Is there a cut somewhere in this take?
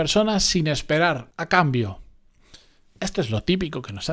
yes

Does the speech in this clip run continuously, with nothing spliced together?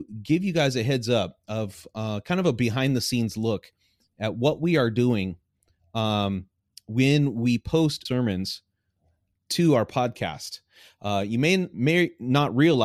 no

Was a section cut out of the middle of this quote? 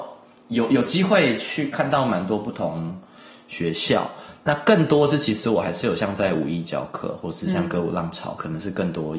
no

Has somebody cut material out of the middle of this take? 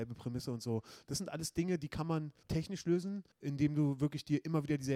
yes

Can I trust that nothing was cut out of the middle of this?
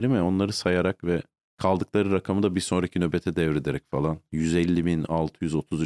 no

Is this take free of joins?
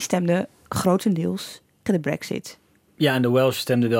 no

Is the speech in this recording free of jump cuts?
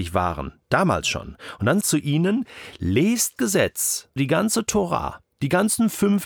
no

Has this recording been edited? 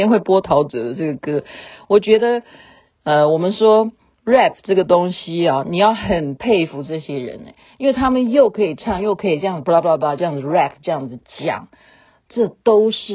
no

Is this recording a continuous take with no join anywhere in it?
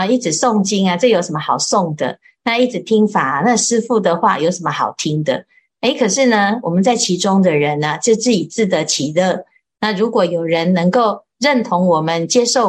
yes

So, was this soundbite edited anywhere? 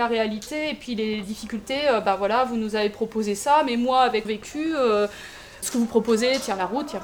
yes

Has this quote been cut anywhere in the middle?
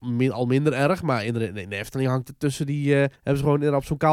yes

